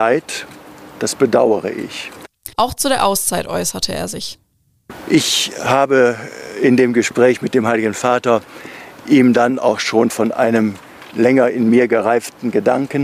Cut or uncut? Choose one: cut